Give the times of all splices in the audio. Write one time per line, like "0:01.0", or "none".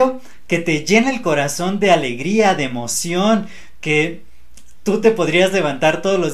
none